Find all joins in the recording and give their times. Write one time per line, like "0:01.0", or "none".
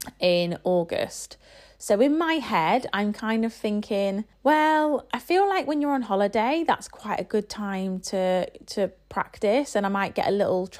0:04.3